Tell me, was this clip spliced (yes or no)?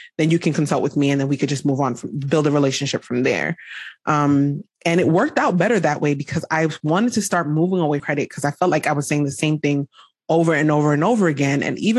yes